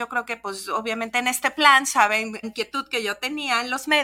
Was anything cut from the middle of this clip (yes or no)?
yes